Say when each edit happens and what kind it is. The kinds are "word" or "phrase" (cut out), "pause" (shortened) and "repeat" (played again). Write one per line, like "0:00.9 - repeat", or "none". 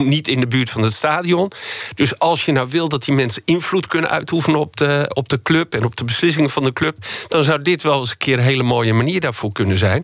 0:05.1 - word